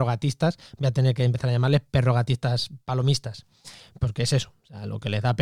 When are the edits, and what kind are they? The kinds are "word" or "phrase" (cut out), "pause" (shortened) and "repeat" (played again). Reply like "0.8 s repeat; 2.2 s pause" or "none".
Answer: none